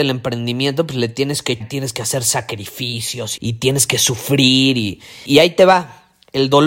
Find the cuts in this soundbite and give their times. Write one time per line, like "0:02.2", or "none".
0:01.6
0:03.4
0:05.3